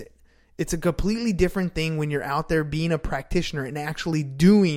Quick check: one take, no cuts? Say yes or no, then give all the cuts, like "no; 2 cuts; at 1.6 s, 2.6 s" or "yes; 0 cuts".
yes; 0 cuts